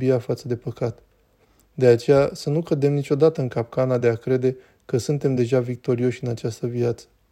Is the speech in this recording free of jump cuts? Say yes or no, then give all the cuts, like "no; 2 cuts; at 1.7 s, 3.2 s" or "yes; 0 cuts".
yes; 0 cuts